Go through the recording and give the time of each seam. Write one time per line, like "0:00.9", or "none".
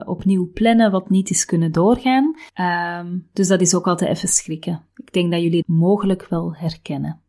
0:02.5
0:05.6